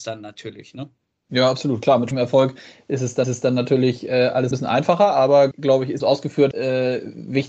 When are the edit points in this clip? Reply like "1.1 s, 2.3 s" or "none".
2.1 s, 3.2 s, 4.5 s, 5.5 s, 6.0 s, 6.5 s